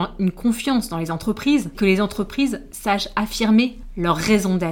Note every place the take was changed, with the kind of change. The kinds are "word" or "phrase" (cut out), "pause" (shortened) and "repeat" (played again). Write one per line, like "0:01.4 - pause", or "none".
0:01.7 - word